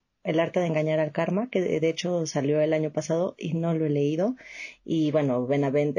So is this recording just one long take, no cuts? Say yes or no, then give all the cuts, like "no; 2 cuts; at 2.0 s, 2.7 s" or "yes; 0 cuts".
yes; 0 cuts